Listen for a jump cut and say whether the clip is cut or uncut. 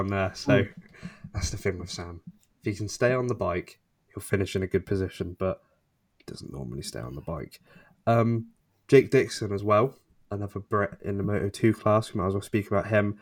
uncut